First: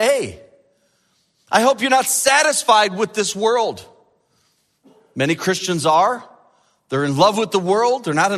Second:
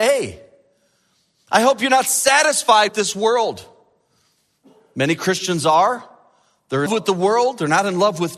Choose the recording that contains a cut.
second; 2 cuts; at 2.9 s, 6.9 s

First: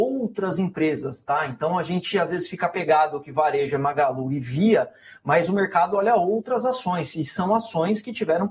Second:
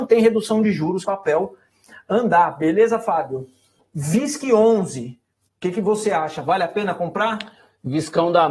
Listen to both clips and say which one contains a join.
second; 2 cuts; at 1.0 s, 3.8 s

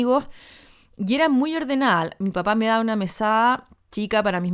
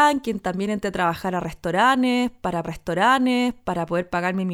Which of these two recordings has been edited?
second; 1 cut; at 2.6 s

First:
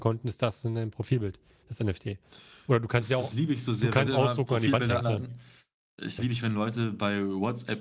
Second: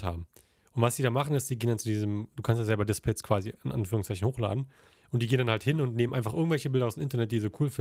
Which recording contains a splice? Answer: first; 3 cuts; at 4.1 s, 5.0 s, 6.2 s

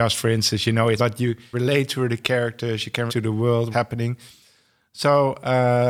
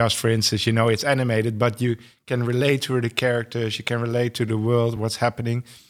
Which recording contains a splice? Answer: first; 4 cuts; at 1.0 s, 1.5 s, 3.1 s, 3.7 s

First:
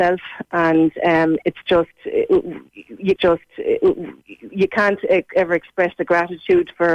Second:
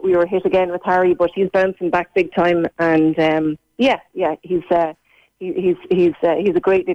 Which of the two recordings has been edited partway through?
first; 1 cut; at 3.2 s

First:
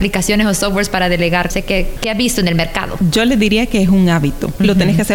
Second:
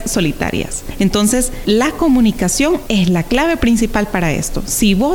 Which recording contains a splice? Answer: first; 1 cut; at 1.5 s

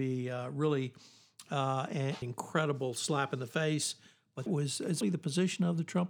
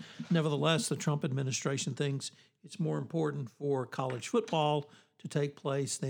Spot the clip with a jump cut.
first; 3 cuts; at 2.2 s, 4.5 s, 5.0 s

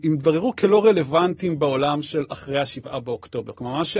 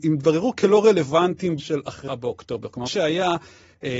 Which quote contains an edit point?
second; 3 cuts; at 1.6 s, 2.1 s, 2.9 s

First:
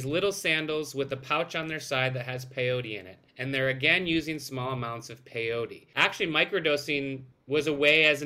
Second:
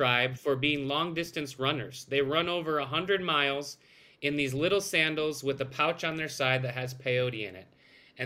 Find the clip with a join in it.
first; 1 cut; at 3.3 s

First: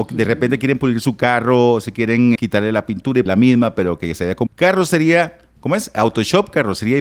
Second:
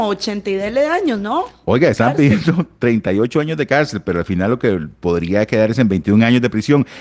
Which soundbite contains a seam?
first; 3 cuts; at 2.4 s, 3.3 s, 4.5 s

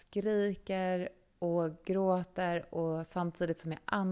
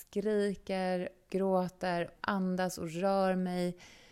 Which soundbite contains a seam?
second; 2 cuts; at 1.3 s, 2.2 s

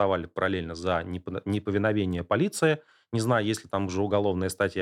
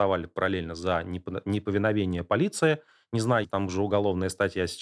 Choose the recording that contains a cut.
second; 1 cut; at 3.4 s

